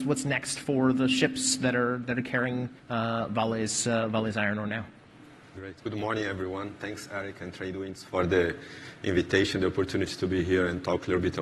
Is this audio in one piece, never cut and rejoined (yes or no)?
no